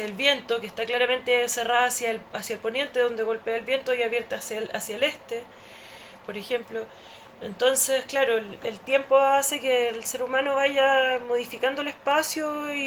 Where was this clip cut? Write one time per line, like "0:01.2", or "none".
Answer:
none